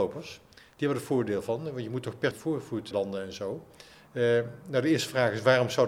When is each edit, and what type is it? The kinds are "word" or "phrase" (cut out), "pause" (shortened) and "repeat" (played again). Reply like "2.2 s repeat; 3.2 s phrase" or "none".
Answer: 2.3 s word; 2.9 s word; 3.9 s pause